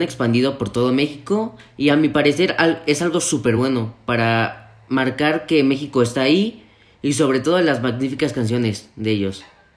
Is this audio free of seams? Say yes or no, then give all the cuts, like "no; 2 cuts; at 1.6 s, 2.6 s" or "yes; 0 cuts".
yes; 0 cuts